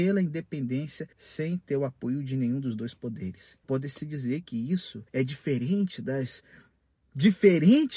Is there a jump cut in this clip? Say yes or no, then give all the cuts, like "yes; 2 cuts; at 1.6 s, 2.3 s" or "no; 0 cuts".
yes; 3 cuts; at 1.1 s, 3.6 s, 5.1 s